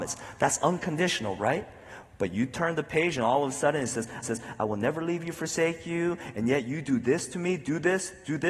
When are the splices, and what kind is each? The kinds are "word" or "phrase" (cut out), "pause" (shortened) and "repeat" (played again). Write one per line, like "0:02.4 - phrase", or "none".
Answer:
0:04.2 - repeat